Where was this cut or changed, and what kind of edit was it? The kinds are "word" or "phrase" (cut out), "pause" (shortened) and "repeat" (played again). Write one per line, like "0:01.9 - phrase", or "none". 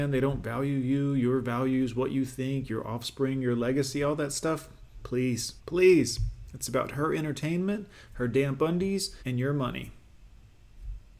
0:05.6 - pause
0:09.2 - pause